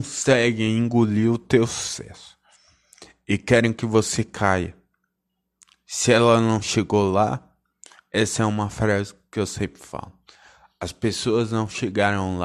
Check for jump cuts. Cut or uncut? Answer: uncut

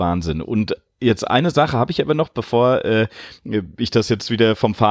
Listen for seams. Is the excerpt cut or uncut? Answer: uncut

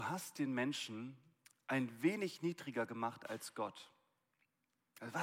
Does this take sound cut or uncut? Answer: uncut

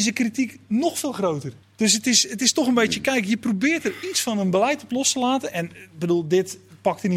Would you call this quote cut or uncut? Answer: cut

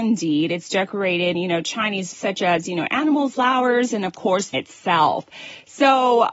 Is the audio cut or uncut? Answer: cut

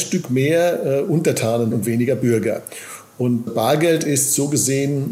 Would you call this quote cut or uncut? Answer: cut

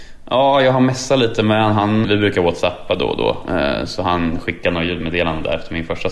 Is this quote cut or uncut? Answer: cut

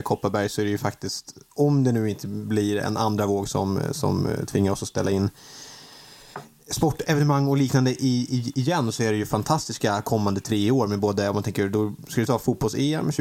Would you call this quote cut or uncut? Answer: cut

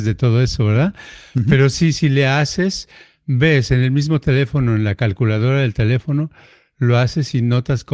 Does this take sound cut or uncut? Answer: uncut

